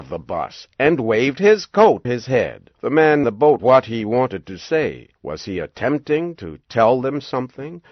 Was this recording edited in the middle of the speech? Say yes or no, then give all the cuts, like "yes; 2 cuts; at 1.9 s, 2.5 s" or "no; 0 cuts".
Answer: yes; 5 cuts; at 2.0 s, 2.7 s, 3.2 s, 3.6 s, 5.2 s